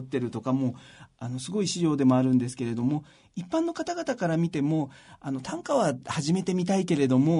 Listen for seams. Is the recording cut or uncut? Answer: uncut